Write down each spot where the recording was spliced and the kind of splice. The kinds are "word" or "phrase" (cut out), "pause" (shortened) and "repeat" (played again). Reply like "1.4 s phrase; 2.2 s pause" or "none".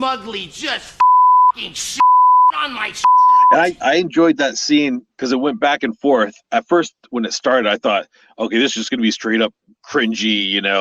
none